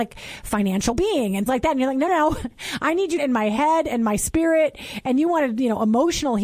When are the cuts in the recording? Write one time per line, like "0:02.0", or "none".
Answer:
0:00.9
0:01.5
0:02.1
0:03.2